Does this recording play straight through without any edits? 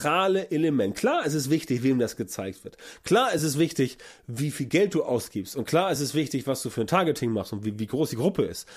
yes; 0 cuts

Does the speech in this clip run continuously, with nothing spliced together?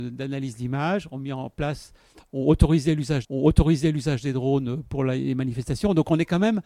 no; 1 cut; at 3.2 s

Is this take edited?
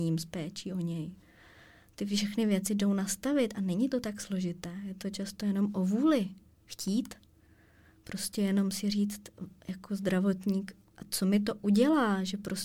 no; 0 cuts

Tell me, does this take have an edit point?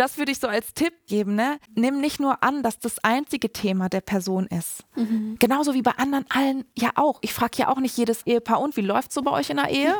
yes; 2 cuts; at 1.7 s, 2.8 s

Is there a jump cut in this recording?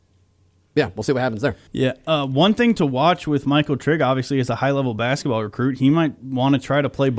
yes; 1 cut; at 1.7 s

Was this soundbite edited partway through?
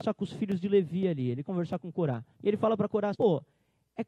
yes; 3 cuts; at 1.4 s, 2.3 s, 3.1 s

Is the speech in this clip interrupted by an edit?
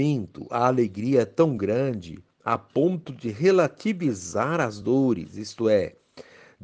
no; 0 cuts

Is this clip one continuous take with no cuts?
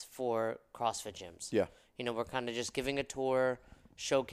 yes; 0 cuts

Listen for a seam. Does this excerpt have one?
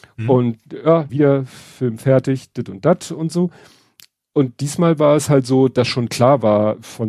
yes; 1 cut; at 1.1 s

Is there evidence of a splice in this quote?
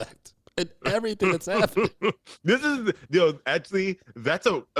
no; 0 cuts

